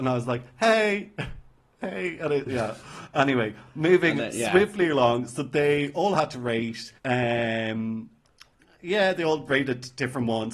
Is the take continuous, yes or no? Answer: no